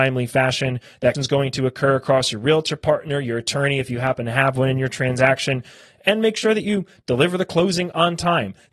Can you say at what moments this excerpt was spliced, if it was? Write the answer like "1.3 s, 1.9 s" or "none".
1.1 s